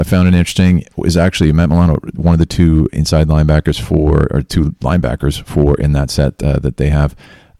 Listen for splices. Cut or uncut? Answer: uncut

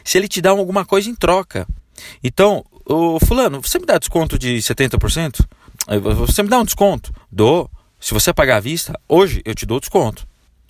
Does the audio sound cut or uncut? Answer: cut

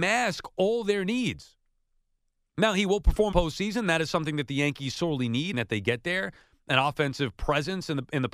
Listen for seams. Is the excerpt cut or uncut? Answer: cut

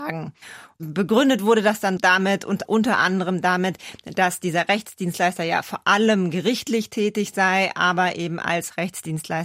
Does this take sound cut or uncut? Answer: cut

